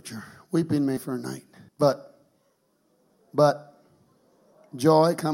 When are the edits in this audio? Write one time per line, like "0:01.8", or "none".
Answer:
0:01.0
0:01.7